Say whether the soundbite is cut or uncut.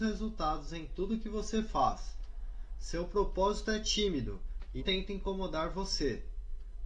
cut